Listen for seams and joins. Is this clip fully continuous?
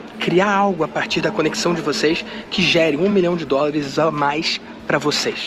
yes; 0 cuts

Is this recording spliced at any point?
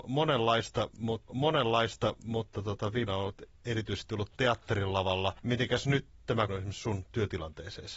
yes; 4 cuts; at 1.3 s, 3.1 s, 5.4 s, 6.5 s

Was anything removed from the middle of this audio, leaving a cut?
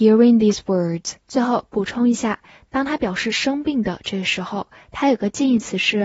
yes; 1 cut; at 1.2 s

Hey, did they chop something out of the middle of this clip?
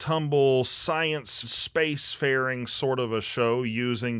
yes; 1 cut; at 1.4 s

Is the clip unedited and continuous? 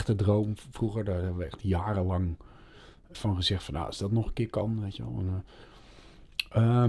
no; 1 cut; at 3.1 s

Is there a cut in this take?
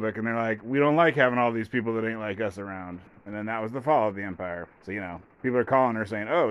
yes; 1 cut; at 4.7 s

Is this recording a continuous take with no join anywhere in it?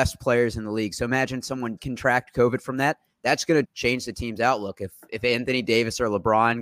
no; 2 cuts; at 1.8 s, 3.6 s

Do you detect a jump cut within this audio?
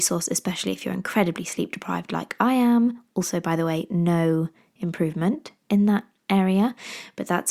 no; 0 cuts

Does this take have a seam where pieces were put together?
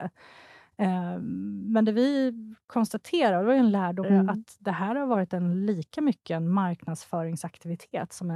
yes; 1 cut; at 4.0 s

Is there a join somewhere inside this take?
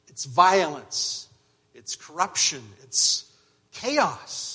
no; 0 cuts

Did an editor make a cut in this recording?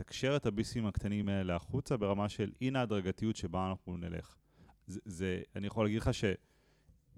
no; 0 cuts

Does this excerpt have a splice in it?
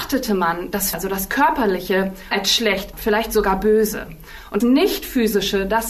yes; 4 cuts; at 0.9 s, 2.3 s, 2.9 s, 4.6 s

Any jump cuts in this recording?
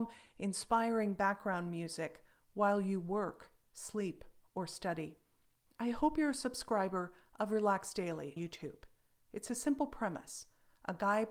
yes; 1 cut; at 8.4 s

